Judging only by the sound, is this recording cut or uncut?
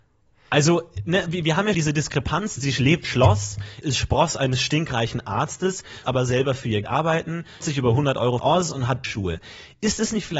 cut